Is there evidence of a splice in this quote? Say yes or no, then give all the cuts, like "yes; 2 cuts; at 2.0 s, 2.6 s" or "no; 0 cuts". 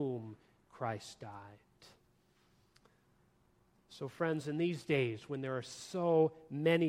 no; 0 cuts